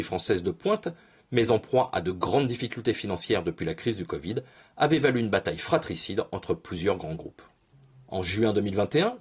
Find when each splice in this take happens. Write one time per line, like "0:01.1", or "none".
none